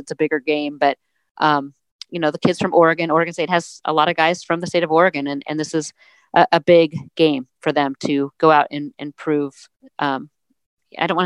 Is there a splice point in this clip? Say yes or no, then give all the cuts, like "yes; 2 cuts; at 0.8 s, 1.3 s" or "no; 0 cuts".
yes; 2 cuts; at 8.3 s, 9.7 s